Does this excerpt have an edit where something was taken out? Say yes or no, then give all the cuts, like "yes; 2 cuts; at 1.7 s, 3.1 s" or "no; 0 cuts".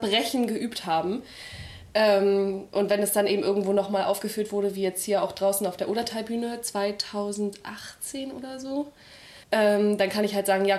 yes; 1 cut; at 9.4 s